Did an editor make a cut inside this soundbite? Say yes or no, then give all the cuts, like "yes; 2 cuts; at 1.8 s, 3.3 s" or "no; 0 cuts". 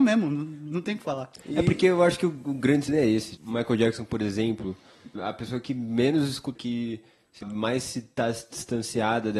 yes; 5 cuts; at 2.9 s, 3.4 s, 5.2 s, 6.6 s, 7.4 s